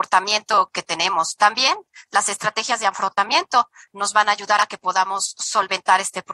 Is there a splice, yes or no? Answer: no